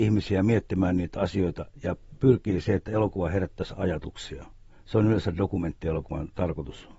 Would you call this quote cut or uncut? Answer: cut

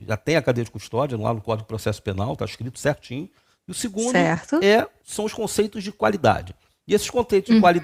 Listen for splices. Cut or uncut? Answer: uncut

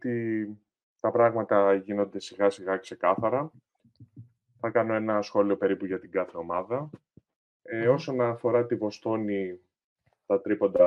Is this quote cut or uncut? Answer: uncut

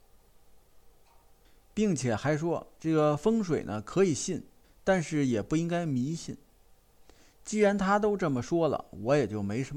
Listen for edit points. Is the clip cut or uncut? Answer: uncut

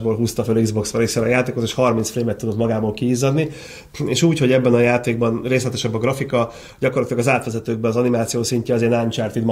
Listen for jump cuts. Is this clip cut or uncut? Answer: uncut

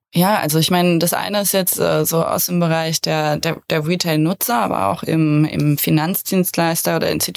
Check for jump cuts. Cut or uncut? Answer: uncut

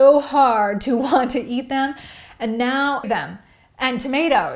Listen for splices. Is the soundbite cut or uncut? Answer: cut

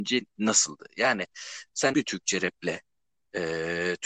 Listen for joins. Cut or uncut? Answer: cut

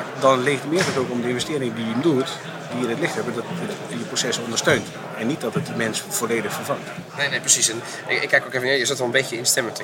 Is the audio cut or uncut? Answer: cut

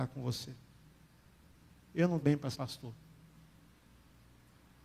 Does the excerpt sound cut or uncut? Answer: cut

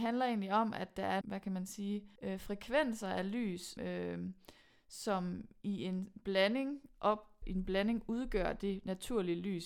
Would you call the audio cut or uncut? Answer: cut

